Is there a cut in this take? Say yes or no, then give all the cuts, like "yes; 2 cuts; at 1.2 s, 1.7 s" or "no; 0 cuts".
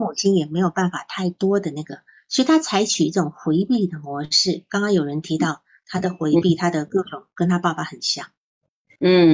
no; 0 cuts